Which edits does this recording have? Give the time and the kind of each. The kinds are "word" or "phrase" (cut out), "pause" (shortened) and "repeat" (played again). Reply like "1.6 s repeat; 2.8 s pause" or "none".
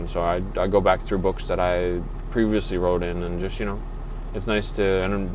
none